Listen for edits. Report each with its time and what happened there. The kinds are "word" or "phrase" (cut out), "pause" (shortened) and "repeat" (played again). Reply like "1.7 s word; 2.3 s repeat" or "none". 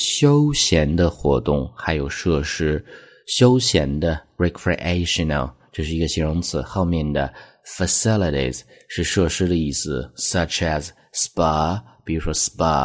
none